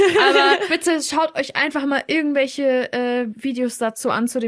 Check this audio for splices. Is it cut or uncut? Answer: uncut